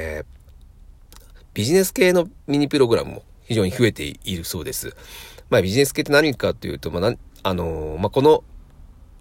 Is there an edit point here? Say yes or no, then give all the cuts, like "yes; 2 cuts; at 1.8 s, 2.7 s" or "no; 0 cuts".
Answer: yes; 1 cut; at 2.4 s